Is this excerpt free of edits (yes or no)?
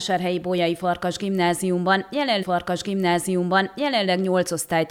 no